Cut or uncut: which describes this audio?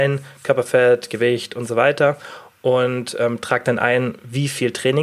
uncut